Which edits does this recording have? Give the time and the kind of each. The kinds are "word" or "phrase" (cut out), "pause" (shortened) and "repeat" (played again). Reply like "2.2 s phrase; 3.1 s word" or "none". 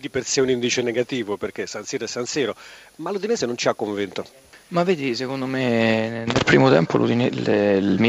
none